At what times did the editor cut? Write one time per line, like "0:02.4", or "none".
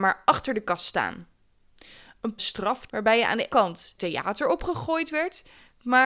0:02.4
0:02.9
0:03.5
0:04.0